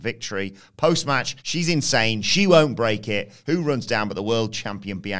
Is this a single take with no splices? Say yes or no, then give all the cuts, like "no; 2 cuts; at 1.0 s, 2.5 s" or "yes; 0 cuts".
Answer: no; 1 cut; at 1.4 s